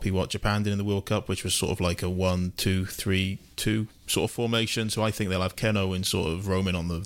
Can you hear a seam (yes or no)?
no